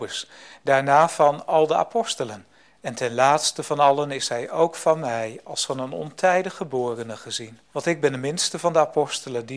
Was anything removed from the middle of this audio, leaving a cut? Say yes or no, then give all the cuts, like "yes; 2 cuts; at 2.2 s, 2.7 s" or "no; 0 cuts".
yes; 2 cuts; at 2.6 s, 7.6 s